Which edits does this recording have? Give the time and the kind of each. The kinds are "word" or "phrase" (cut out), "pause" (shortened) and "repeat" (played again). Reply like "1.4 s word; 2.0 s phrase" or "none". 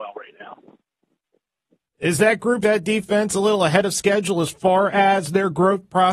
2.6 s word